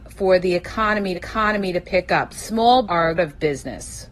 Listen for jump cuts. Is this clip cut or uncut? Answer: cut